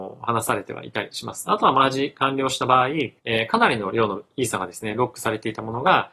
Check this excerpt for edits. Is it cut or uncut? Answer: cut